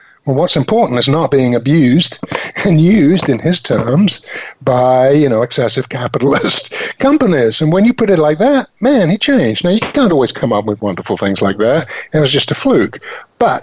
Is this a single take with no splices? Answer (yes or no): yes